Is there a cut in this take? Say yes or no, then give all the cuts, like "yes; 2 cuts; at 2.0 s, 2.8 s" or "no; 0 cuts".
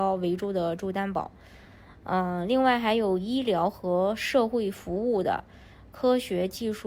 no; 0 cuts